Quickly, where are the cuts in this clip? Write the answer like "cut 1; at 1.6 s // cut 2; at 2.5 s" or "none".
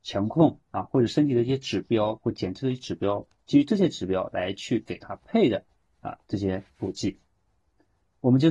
none